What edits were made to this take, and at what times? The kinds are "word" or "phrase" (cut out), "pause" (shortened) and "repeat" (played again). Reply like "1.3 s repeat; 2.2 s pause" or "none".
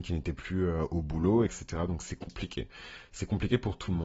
1.5 s word